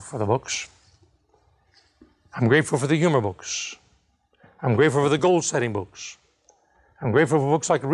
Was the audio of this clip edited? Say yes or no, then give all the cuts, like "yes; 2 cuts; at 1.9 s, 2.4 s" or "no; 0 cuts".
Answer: no; 0 cuts